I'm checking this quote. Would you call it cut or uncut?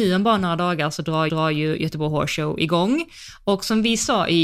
cut